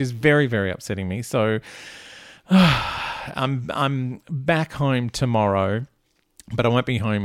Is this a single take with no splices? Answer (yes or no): yes